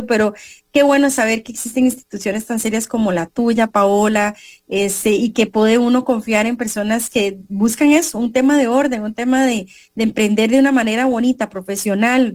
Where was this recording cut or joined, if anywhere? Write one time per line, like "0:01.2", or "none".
none

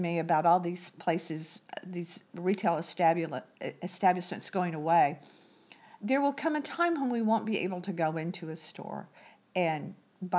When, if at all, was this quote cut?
none

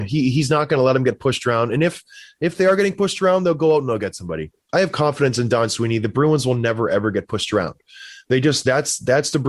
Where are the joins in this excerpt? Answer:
none

